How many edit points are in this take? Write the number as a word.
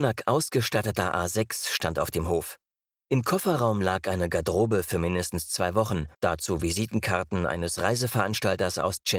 one